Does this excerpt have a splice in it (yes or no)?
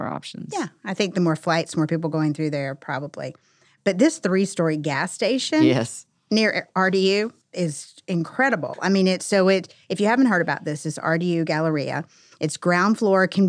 no